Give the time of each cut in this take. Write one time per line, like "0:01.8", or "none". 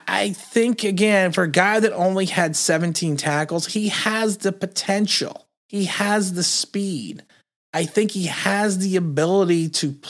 0:05.6